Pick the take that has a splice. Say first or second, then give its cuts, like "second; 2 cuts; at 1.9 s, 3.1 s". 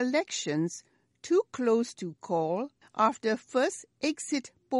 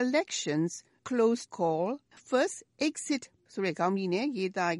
second; 4 cuts; at 1.0 s, 1.5 s, 2.2 s, 3.5 s